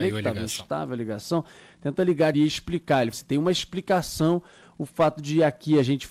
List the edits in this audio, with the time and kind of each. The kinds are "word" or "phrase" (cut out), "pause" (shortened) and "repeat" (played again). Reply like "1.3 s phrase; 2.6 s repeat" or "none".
2.3 s phrase; 3.1 s word